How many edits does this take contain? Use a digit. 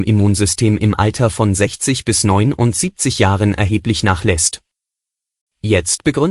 0